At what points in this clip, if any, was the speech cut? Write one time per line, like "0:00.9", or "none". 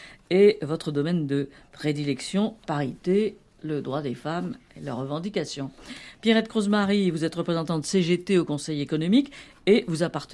0:02.6

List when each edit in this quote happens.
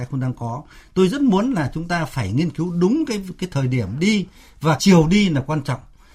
0:04.8

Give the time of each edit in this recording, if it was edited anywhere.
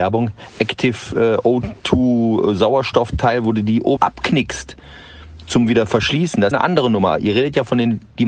0:04.0
0:06.5

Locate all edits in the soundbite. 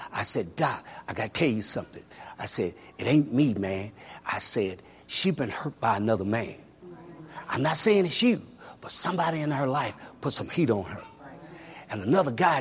none

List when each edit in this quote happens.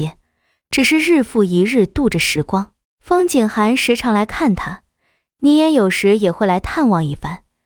0:02.8

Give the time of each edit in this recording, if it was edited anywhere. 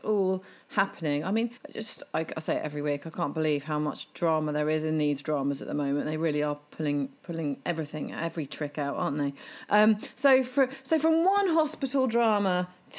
0:01.6

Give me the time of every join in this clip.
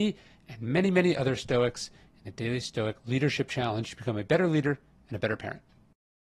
none

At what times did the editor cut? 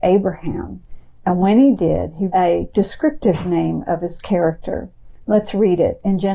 0:02.3

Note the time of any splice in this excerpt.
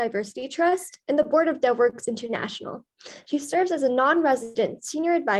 0:01.0

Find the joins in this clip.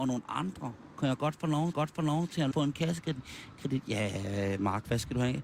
0:01.7
0:02.5

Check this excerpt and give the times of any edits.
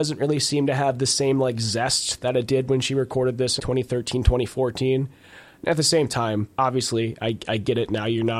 0:03.6
0:06.5

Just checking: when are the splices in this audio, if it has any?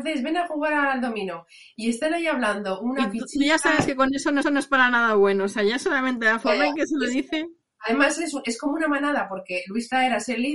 0:04.4

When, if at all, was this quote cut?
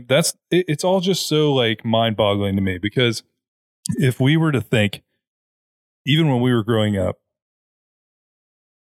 none

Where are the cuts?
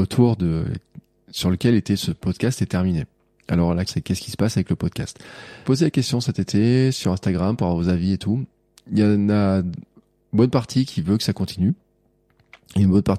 0:03.9
0:05.6

